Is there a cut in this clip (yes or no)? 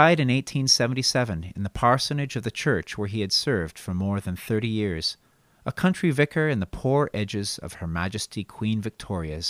yes